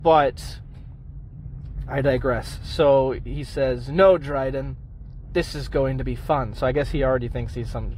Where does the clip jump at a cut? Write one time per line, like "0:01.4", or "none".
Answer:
none